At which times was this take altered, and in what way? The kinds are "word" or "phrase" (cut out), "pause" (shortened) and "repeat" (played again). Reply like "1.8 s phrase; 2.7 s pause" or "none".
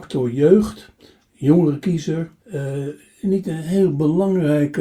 2.4 s pause